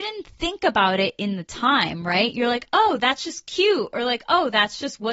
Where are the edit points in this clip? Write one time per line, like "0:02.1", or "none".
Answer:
none